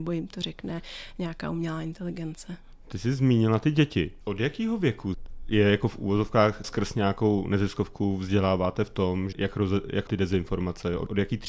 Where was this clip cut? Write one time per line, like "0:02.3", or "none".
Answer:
0:06.6
0:09.3
0:10.1